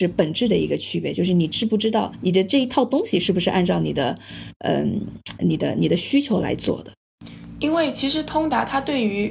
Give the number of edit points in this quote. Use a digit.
0